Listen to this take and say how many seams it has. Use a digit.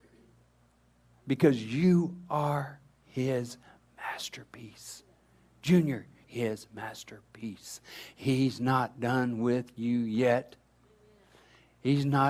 1